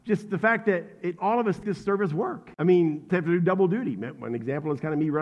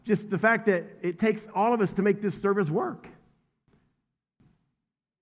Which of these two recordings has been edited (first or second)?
first